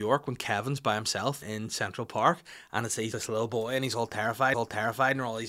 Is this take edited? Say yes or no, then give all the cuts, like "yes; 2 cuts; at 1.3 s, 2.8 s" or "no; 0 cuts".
yes; 3 cuts; at 1.4 s, 3.1 s, 4.5 s